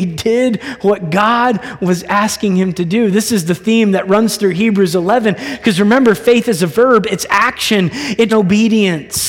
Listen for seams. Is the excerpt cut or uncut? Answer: cut